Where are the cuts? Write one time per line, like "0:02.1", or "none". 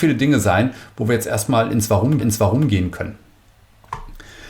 0:02.2